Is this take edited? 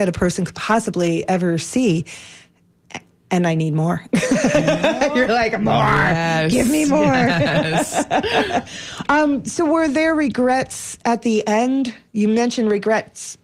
no; 0 cuts

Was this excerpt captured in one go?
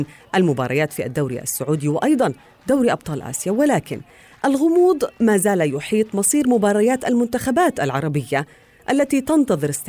yes; 0 cuts

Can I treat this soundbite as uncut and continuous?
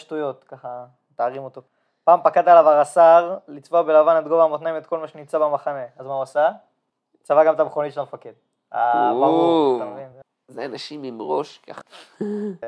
yes; 0 cuts

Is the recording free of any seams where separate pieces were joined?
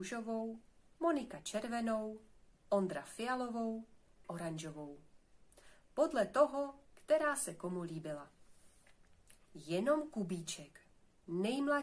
no; 2 cuts; at 4.2 s, 9.4 s

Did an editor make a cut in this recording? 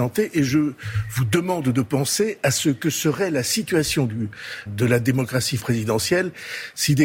yes; 2 cuts; at 4.7 s, 5.6 s

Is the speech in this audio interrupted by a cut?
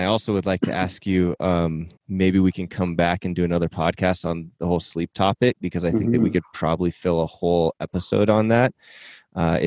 yes; 1 cut; at 2.0 s

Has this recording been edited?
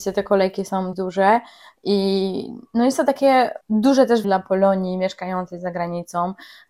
yes; 3 cuts; at 0.9 s, 3.6 s, 4.2 s

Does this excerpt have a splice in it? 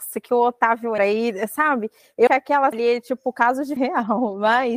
yes; 4 cuts; at 1.0 s, 2.3 s, 2.7 s, 3.8 s

